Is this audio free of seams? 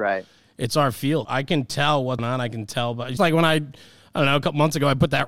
no; 3 cuts; at 1.2 s, 2.2 s, 3.2 s

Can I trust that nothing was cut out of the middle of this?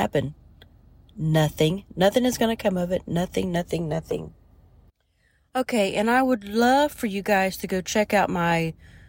yes; 0 cuts

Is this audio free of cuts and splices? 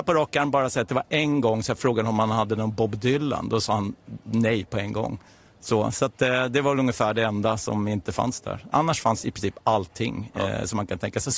yes; 0 cuts

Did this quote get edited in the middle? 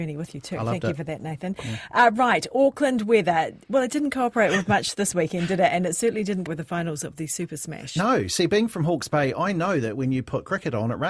yes; 1 cut; at 6.5 s

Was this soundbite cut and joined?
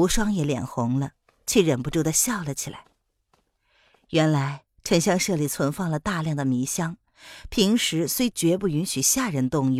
no; 0 cuts

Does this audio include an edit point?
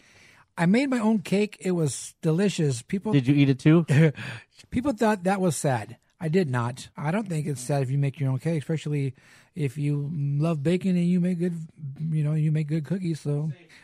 no; 0 cuts

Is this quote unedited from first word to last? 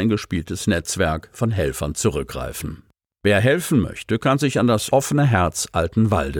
yes; 0 cuts

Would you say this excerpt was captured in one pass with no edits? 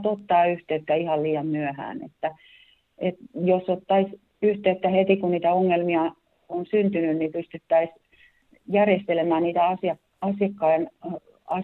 yes; 0 cuts

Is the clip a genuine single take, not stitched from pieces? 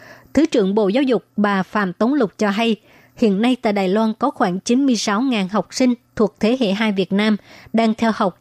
yes; 0 cuts

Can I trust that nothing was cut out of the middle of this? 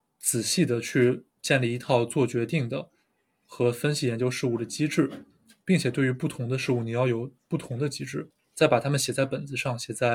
no; 1 cut; at 1.3 s

